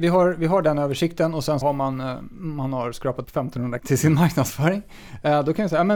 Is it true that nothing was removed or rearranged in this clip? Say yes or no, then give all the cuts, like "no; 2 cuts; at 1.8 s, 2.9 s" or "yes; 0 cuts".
no; 3 cuts; at 1.6 s, 3.2 s, 3.8 s